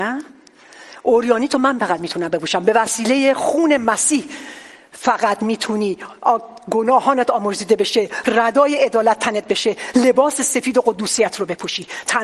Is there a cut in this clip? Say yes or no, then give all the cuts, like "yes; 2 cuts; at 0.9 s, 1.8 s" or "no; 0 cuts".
no; 0 cuts